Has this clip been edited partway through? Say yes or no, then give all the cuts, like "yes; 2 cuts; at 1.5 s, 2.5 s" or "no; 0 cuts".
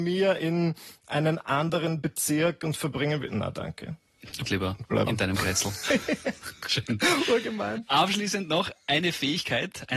yes; 2 cuts; at 4.5 s, 5.1 s